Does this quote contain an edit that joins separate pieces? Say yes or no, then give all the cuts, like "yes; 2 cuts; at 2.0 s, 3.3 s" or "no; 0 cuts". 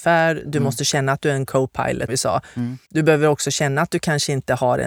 yes; 2 cuts; at 2.1 s, 2.8 s